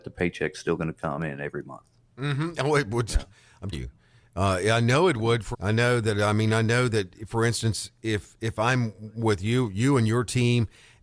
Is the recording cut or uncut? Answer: cut